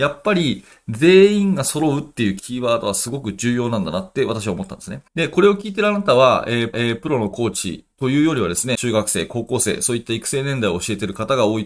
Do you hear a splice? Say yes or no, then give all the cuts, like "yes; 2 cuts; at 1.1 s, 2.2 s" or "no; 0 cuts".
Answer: yes; 4 cuts; at 5.1 s, 6.7 s, 7.9 s, 8.7 s